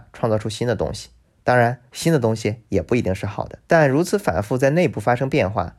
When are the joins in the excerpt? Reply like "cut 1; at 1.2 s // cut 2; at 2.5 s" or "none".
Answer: cut 1; at 1.2 s // cut 2; at 1.9 s // cut 3; at 3.6 s

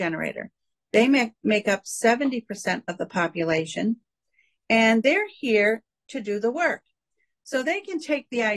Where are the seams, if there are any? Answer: none

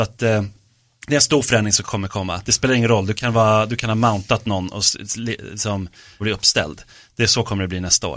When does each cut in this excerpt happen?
cut 1; at 1.8 s // cut 2; at 6.2 s

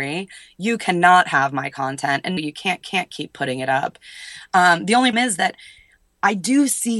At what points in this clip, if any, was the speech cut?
cut 1; at 2.4 s // cut 2; at 2.8 s // cut 3; at 5.1 s

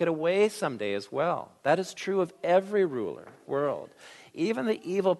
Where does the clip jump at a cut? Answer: cut 1; at 3.4 s

